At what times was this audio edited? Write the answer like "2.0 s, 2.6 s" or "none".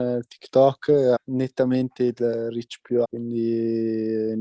1.2 s, 3.0 s